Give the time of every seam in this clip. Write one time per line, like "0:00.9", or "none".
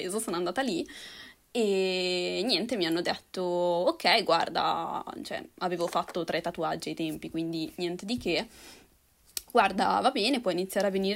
none

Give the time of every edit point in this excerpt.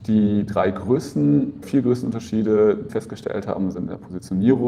0:01.6
0:02.9

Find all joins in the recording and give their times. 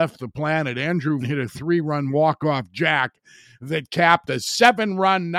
0:01.2

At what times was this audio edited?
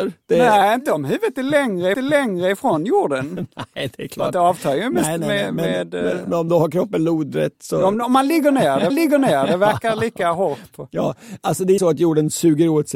0:01.9
0:06.5
0:08.9
0:11.8

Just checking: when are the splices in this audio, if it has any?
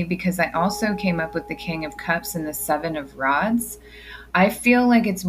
0:04.3

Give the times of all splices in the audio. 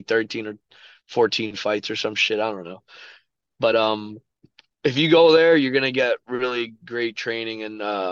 none

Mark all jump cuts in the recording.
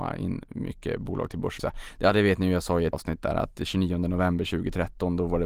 0:01.6
0:02.9

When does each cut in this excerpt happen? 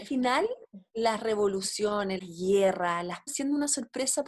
0:02.2
0:03.3

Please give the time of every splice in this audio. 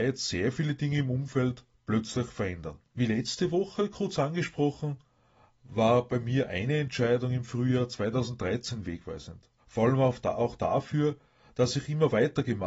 0:02.9
0:09.6

